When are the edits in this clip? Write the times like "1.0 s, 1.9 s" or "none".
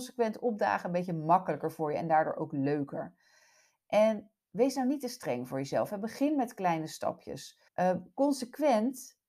7.7 s